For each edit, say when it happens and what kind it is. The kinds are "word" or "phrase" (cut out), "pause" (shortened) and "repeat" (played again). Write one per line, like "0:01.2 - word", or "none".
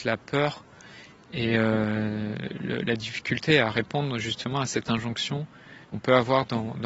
0:05.8 - pause